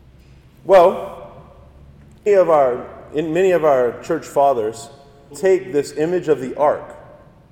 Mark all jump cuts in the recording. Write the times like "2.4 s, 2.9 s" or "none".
2.3 s, 5.3 s